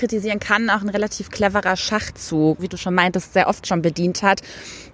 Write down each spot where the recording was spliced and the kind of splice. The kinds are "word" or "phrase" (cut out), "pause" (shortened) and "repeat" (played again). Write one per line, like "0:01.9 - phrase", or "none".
0:02.6 - phrase